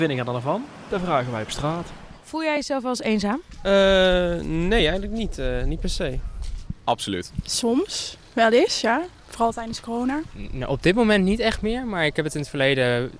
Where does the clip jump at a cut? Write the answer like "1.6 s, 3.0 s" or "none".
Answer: none